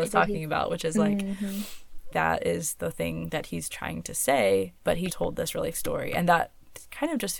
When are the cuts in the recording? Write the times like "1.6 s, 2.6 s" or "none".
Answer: 2.1 s, 4.8 s, 5.1 s, 5.7 s